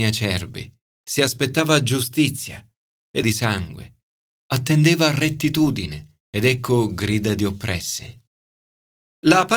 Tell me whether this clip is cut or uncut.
cut